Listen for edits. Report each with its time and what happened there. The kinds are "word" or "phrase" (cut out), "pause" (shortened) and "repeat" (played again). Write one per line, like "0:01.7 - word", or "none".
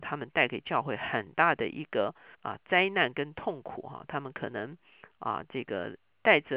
0:02.3 - pause